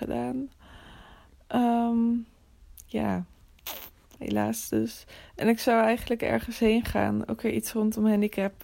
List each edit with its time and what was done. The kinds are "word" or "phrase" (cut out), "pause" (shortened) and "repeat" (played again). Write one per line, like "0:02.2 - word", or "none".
none

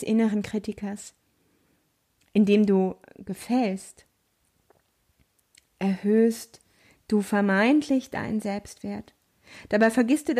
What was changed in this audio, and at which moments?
none

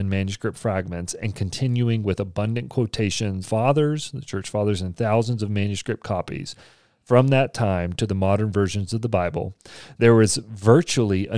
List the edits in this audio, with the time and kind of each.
0:03.4 - phrase

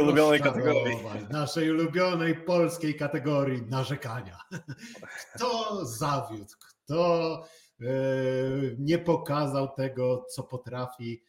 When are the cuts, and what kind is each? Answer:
none

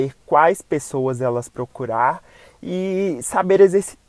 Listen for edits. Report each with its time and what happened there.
0:01.5 - word

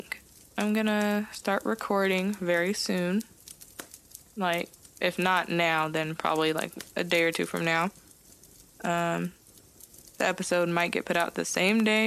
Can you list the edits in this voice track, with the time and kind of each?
none

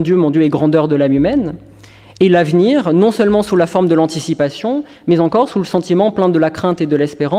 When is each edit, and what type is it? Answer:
none

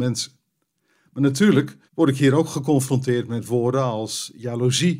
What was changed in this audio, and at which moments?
0:01.9 - pause

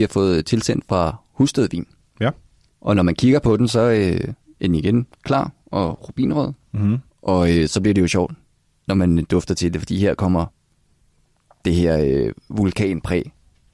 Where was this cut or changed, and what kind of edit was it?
0:04.4 - pause
0:08.5 - pause

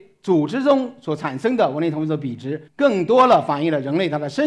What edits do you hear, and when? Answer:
0:02.7 - pause

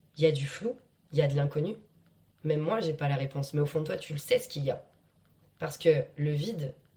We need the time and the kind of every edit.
none

